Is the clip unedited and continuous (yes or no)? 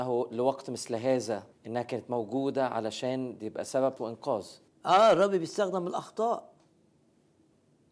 no